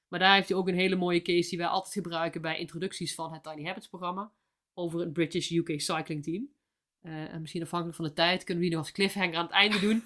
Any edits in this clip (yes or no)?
no